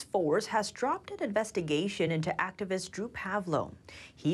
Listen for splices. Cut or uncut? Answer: uncut